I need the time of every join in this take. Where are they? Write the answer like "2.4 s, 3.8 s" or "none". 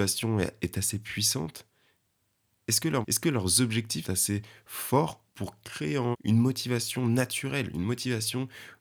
3.0 s, 4.0 s, 5.3 s, 6.1 s